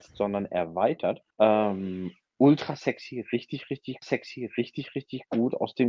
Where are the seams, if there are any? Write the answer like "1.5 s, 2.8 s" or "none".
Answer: 1.3 s, 4.0 s